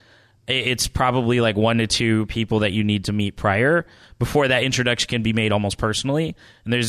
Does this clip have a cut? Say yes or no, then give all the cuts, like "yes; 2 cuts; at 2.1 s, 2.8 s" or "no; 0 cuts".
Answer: no; 0 cuts